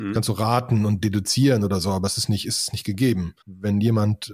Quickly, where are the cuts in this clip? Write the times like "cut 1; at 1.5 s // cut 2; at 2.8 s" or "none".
cut 1; at 3.4 s